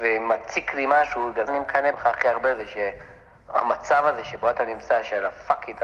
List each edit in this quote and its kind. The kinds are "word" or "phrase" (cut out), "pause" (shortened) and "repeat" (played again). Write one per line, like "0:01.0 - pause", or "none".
0:01.5 - word
0:01.9 - phrase